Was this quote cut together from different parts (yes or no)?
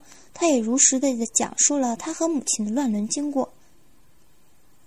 no